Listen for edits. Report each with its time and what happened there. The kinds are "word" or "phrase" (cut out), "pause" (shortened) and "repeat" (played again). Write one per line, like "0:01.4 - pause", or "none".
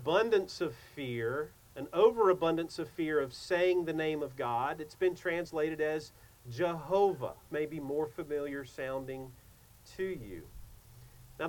0:01.7 - pause
0:07.5 - word